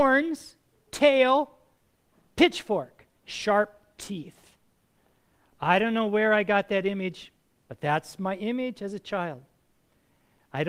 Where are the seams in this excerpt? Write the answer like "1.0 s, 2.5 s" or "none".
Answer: none